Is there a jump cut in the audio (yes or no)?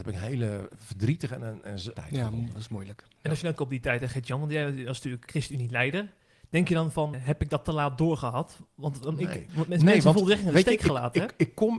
yes